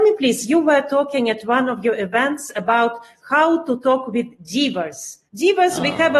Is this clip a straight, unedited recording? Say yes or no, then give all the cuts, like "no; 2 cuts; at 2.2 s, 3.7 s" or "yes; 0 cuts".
no; 1 cut; at 5.3 s